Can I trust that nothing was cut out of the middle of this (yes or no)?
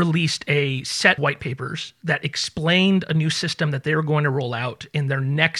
no